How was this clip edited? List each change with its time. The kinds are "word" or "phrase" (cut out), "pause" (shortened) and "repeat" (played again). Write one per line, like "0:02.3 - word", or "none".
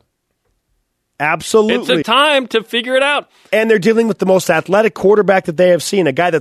0:02.0 - word